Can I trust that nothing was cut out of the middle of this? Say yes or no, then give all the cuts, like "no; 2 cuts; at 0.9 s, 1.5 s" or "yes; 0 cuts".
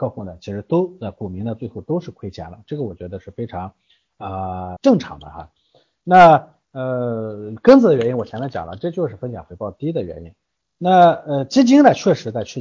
no; 1 cut; at 4.8 s